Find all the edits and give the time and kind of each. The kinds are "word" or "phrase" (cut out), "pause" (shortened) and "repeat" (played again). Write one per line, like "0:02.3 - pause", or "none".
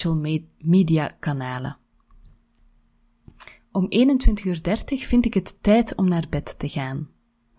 none